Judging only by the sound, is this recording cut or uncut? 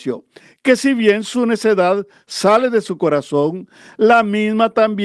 uncut